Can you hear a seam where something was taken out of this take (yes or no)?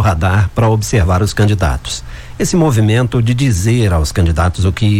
no